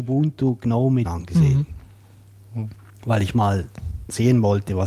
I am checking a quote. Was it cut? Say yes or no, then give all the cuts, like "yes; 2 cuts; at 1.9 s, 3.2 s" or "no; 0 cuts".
yes; 1 cut; at 1.0 s